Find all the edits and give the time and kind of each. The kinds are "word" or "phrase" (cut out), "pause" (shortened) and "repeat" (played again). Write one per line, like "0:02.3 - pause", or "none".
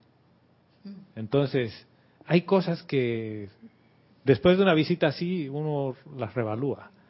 none

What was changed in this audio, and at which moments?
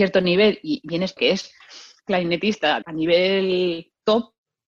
0:01.2 - word
0:02.8 - word

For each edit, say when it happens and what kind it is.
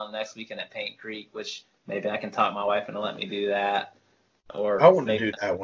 none

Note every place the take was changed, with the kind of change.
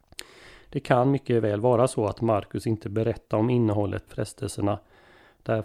0:04.1 - word

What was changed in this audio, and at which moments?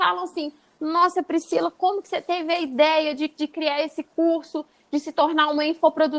none

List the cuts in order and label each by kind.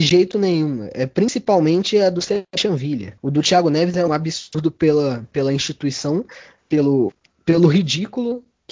0:03.2 - pause
0:04.1 - word
0:07.3 - pause

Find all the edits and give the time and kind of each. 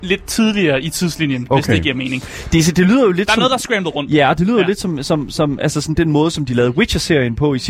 none

